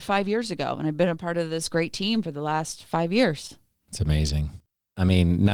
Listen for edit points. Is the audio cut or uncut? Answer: uncut